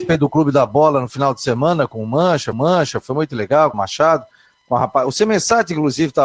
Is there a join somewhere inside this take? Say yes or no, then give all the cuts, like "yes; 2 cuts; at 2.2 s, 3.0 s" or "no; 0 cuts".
yes; 2 cuts; at 2.5 s, 3.7 s